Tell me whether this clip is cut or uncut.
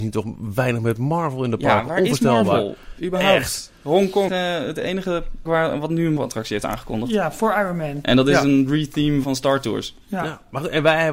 cut